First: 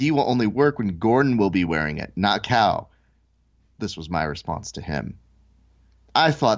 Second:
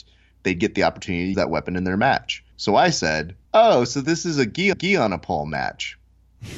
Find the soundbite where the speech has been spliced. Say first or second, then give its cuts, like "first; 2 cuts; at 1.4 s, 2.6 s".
second; 4 cuts; at 1.3 s, 2.5 s, 3.4 s, 4.7 s